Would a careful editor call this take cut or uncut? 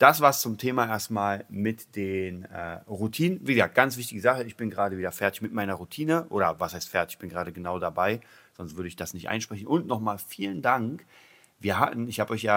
uncut